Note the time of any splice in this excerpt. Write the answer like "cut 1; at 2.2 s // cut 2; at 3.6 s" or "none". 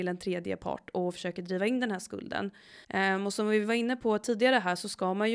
cut 1; at 2.8 s